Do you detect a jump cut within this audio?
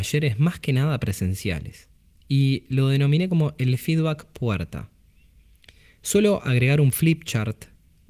no; 0 cuts

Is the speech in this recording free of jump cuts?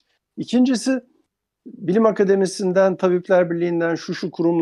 yes; 0 cuts

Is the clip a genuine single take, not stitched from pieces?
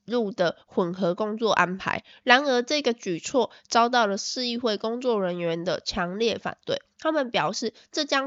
no; 1 cut; at 6.9 s

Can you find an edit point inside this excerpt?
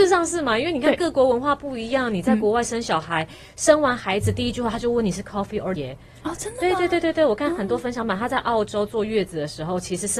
yes; 1 cut; at 5.8 s

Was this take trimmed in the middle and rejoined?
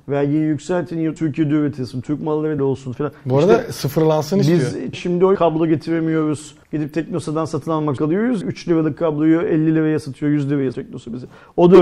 yes; 8 cuts; at 1.2 s, 2.6 s, 4.9 s, 5.4 s, 6.6 s, 8.0 s, 8.4 s, 10.7 s

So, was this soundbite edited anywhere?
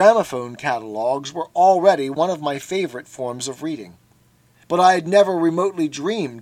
no; 0 cuts

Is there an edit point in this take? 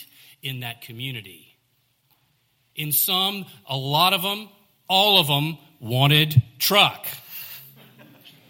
no; 0 cuts

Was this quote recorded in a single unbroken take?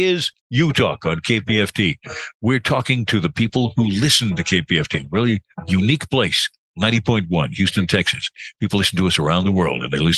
yes; 0 cuts

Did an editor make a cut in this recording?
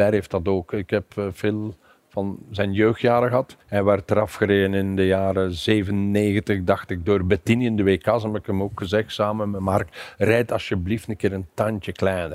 yes; 1 cut; at 3.6 s

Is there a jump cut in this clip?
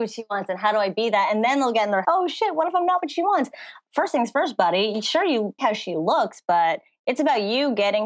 yes; 2 cuts; at 2.0 s, 5.6 s

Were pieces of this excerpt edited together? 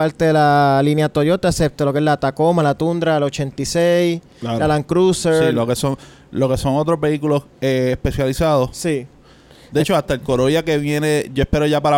no; 0 cuts

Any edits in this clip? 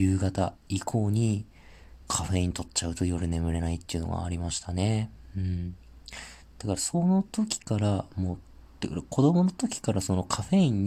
yes; 2 cuts; at 2.0 s, 8.6 s

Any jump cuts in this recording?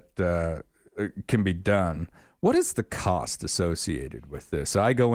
no; 0 cuts

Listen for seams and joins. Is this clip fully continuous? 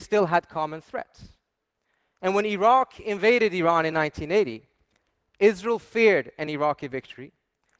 yes; 0 cuts

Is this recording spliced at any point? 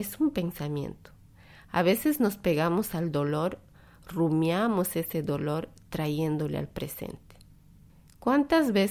no; 0 cuts

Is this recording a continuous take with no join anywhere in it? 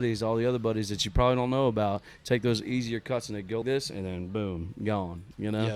no; 1 cut; at 3.6 s

